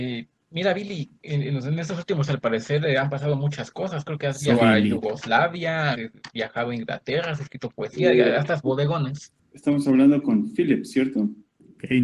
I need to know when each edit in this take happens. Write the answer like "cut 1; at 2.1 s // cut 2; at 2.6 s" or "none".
cut 1; at 1.2 s // cut 2; at 2.3 s // cut 3; at 4.5 s // cut 4; at 5.9 s // cut 5; at 8.6 s